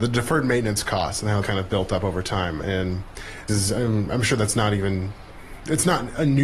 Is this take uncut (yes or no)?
no